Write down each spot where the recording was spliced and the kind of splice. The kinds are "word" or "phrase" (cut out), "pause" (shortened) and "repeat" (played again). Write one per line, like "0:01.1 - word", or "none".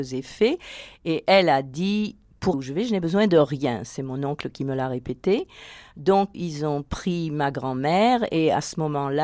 0:02.5 - word
0:06.3 - word